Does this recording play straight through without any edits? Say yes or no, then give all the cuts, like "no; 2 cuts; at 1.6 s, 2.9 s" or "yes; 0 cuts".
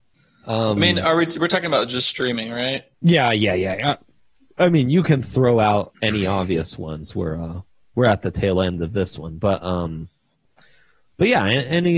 no; 1 cut; at 2.9 s